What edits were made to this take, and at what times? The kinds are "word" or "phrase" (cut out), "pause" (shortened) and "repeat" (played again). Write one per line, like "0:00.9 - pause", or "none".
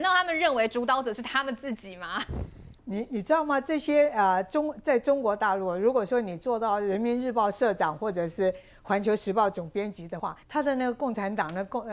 0:02.8 - pause
0:10.4 - pause